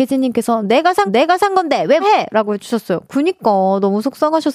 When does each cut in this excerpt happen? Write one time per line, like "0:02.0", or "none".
0:01.1
0:02.0